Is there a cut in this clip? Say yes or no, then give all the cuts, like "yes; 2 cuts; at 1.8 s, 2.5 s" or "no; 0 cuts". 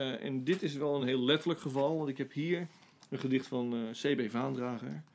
no; 0 cuts